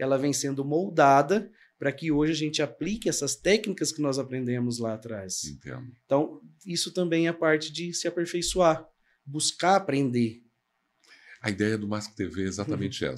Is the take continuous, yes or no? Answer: yes